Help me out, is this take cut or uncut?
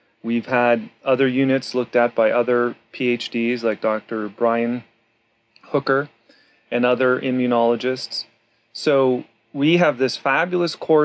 uncut